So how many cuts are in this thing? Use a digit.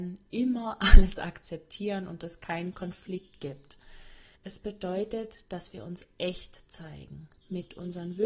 1